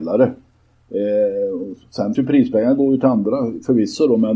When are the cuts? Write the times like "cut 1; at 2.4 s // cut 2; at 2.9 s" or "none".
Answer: cut 1; at 2.1 s